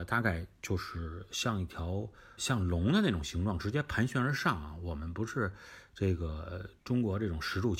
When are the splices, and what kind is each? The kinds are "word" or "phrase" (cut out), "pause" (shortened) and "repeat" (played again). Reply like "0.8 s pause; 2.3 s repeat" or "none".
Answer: 2.4 s word; 6.8 s pause